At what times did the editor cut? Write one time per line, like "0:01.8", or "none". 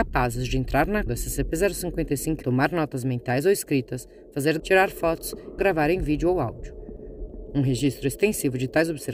0:01.1
0:02.4
0:04.6
0:05.6